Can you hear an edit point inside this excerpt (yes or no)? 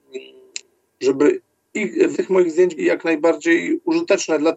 yes